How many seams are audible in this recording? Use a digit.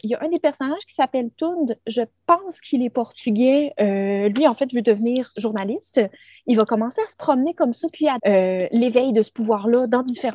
1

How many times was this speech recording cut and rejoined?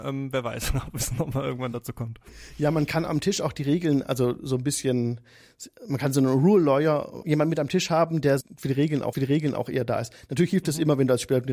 3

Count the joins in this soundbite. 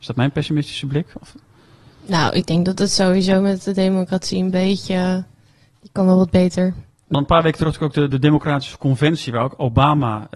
0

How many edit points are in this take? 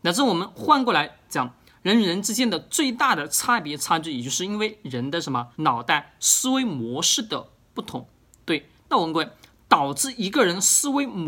1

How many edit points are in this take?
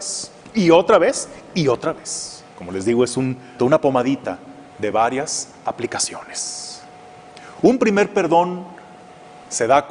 3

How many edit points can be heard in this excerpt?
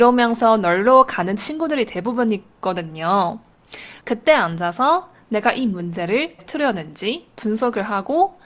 2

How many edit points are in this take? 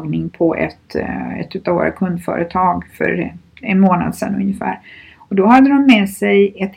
0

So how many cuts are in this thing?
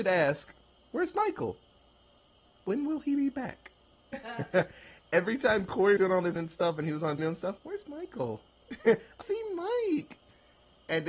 5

